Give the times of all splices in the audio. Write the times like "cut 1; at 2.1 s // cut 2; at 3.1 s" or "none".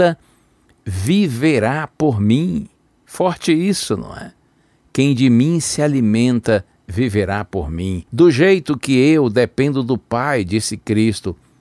cut 1; at 2.8 s // cut 2; at 8.1 s